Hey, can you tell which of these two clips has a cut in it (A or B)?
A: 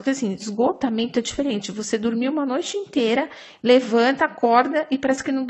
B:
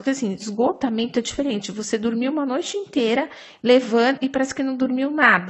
B